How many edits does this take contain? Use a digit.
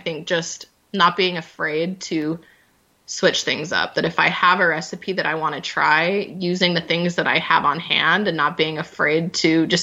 0